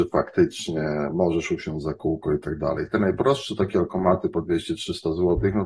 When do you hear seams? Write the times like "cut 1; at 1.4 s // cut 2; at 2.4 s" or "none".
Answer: none